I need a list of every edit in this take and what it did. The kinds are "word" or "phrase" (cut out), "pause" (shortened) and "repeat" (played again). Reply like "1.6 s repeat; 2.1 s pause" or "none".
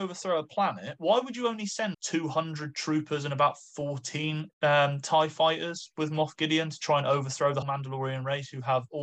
1.9 s word; 4.5 s pause; 7.6 s word